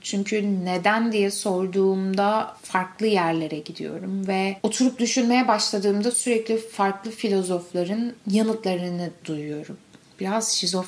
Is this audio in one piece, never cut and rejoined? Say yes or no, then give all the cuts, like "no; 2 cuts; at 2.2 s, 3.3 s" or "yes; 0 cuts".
yes; 0 cuts